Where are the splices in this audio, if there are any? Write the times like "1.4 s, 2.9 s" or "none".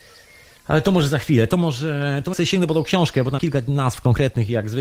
2.3 s, 3.4 s